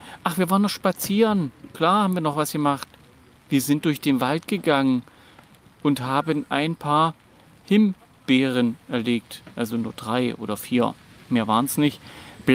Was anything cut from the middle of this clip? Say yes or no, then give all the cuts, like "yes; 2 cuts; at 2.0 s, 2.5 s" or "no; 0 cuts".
no; 0 cuts